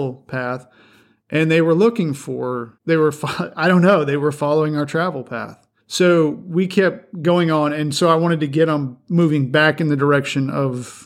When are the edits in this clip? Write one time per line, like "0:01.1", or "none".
0:02.8
0:07.1